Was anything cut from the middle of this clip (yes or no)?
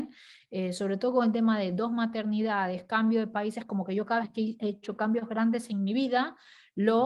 no